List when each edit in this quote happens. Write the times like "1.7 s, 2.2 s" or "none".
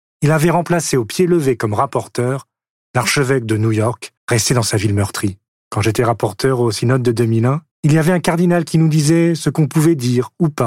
4.2 s, 5.5 s, 7.7 s